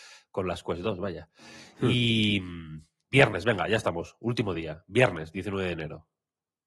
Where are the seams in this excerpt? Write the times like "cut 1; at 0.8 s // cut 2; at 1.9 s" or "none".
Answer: none